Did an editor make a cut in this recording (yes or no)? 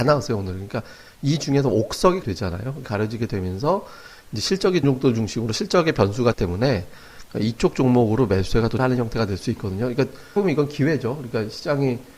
yes